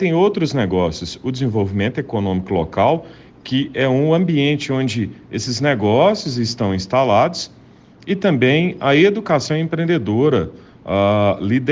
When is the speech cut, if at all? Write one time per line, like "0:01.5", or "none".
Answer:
none